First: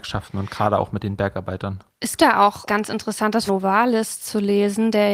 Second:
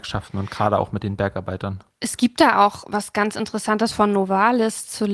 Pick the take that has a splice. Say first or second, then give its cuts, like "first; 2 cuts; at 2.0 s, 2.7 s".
first; 3 cuts; at 2.2 s, 2.7 s, 3.5 s